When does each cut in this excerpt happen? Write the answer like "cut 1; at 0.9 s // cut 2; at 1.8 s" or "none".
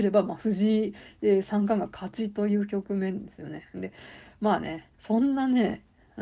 cut 1; at 4.9 s